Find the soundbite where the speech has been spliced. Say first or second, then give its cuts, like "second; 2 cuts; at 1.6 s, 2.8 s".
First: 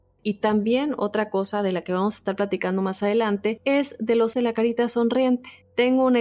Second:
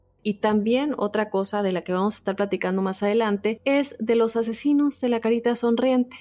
first; 1 cut; at 4.3 s